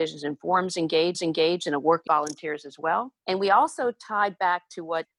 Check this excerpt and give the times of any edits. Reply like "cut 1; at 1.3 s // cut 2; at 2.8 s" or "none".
cut 1; at 1.1 s // cut 2; at 2.1 s // cut 3; at 3.2 s

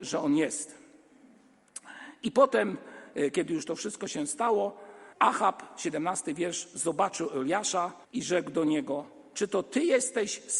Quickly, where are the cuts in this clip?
cut 1; at 5.1 s // cut 2; at 8.0 s

